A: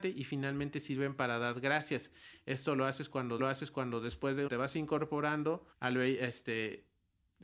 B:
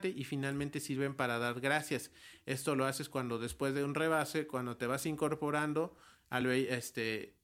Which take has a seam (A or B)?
A